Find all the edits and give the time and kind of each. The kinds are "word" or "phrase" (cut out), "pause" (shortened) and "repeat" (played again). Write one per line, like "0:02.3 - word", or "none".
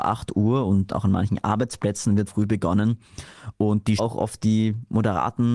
0:02.3 - word
0:04.0 - phrase